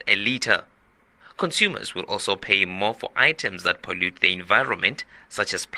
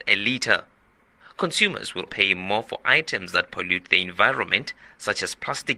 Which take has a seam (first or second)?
second